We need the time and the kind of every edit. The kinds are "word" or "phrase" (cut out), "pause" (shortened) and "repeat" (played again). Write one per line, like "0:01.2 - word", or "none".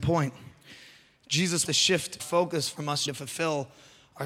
0:01.6 - word
0:02.2 - word
0:03.1 - word